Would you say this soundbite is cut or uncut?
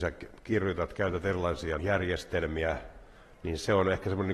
cut